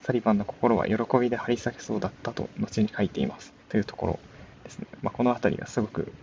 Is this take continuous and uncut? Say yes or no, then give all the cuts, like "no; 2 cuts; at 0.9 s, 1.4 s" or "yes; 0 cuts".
no; 1 cut; at 3.6 s